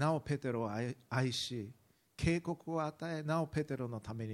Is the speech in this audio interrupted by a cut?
no; 0 cuts

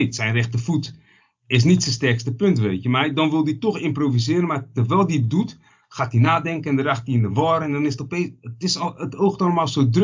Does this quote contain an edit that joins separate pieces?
no; 0 cuts

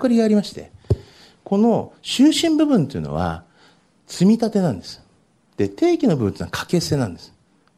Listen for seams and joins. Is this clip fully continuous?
yes; 0 cuts

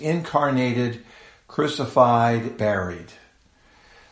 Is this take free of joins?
no; 1 cut; at 2.6 s

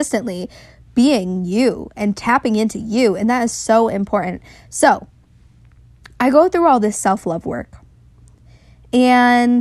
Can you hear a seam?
no; 0 cuts

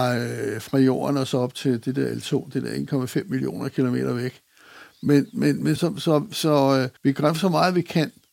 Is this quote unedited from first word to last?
no; 2 cuts; at 5.8 s, 7.0 s

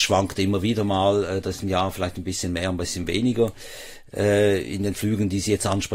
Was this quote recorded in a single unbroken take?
yes; 0 cuts

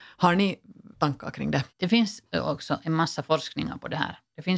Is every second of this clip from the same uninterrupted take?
no; 2 cuts; at 0.9 s, 1.7 s

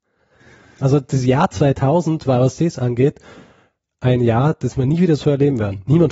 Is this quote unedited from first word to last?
yes; 0 cuts

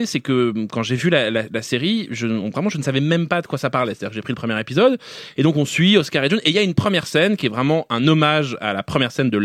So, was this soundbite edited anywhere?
no; 0 cuts

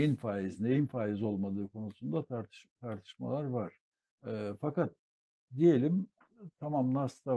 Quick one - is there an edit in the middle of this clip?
yes; 1 cut; at 3.9 s

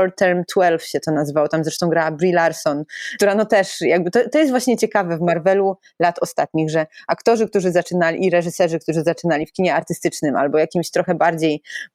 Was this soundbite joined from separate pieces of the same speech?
no; 0 cuts

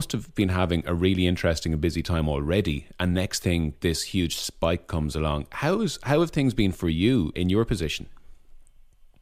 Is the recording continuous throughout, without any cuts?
no; 1 cut; at 7.3 s

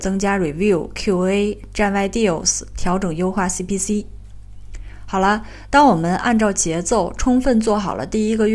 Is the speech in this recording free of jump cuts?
yes; 0 cuts

